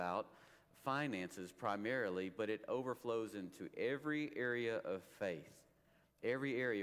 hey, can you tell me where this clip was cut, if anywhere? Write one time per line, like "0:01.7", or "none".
none